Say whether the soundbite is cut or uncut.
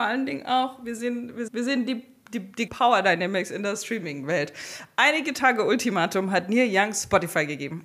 cut